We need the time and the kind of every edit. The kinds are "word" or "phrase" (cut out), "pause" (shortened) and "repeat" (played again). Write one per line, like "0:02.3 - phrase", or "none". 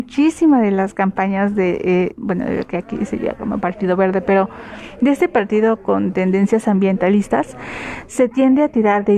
0:02.1 - phrase